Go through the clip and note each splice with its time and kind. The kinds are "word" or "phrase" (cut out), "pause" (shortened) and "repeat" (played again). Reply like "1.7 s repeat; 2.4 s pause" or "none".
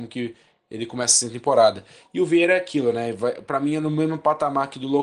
none